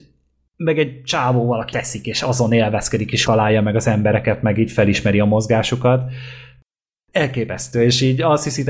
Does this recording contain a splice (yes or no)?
yes